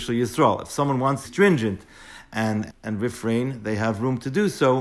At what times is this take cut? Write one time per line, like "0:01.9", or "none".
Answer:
0:01.2
0:02.7